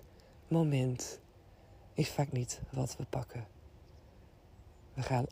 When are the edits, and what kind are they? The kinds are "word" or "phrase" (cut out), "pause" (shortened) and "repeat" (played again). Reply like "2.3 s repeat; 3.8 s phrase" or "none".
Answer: none